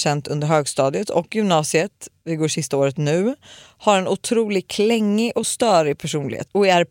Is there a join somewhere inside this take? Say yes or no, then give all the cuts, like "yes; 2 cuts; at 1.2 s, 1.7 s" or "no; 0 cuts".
no; 0 cuts